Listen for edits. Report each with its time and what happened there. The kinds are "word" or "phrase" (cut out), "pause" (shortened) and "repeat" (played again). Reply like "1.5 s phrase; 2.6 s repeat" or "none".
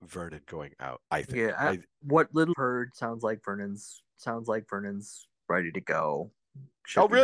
1.1 s pause; 2.0 s word; 2.5 s word; 4.2 s repeat